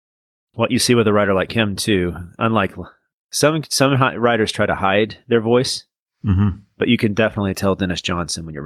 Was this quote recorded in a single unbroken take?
yes; 0 cuts

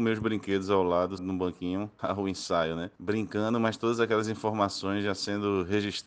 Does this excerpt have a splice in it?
yes; 3 cuts; at 1.2 s, 2.0 s, 2.9 s

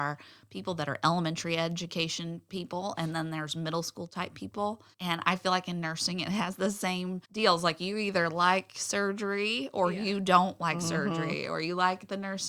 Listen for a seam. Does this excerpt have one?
yes; 2 cuts; at 4.9 s, 7.2 s

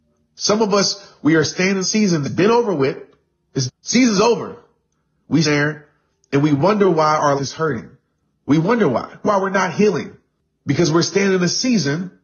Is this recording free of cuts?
no; 6 cuts; at 1.8 s, 2.2 s, 3.7 s, 5.4 s, 7.4 s, 9.2 s

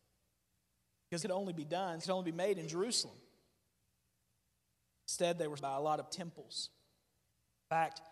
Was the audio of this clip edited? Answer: yes; 4 cuts; at 1.2 s, 2.0 s, 5.6 s, 6.1 s

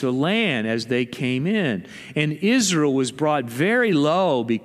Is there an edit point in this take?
no; 0 cuts

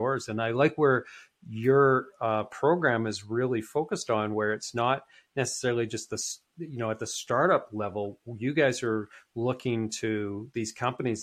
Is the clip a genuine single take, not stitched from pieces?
yes; 0 cuts

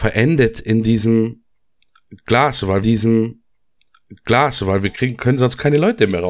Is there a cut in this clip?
yes; 1 cut; at 2.8 s

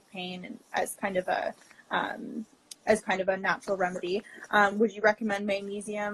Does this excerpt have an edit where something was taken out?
no; 0 cuts

